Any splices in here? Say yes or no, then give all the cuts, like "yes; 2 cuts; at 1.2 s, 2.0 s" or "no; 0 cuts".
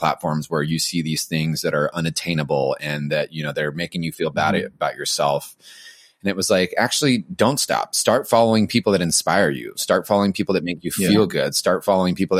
no; 0 cuts